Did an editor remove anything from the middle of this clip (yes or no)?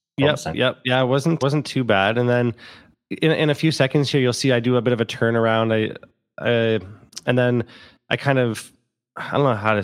yes